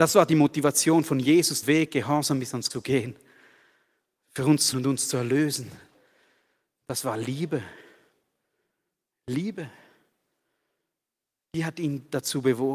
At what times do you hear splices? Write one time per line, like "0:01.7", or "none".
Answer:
0:01.6
0:02.7
0:04.7

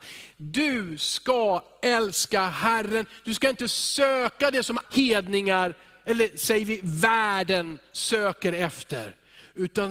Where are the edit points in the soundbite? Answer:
0:04.8

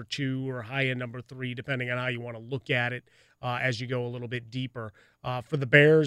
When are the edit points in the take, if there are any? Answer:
none

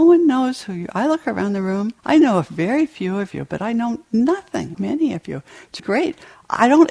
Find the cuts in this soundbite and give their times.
0:02.0
0:04.7
0:05.8

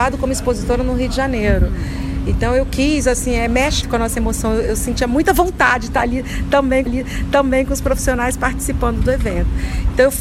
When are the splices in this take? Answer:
0:03.8
0:06.9

